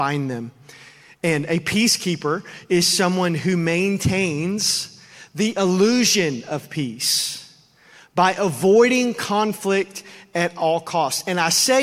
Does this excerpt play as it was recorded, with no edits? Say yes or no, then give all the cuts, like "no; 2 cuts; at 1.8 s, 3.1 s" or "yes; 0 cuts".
yes; 0 cuts